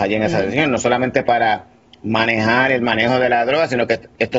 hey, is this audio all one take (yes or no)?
yes